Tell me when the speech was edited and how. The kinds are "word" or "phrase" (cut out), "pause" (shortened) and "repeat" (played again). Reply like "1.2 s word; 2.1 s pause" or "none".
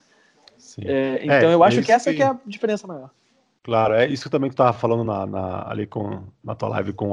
none